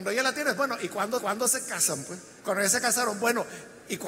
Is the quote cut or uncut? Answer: cut